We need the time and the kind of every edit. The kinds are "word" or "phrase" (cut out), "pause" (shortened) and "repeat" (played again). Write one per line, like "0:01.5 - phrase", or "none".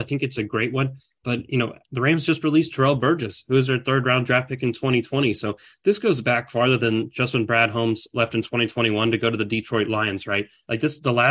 none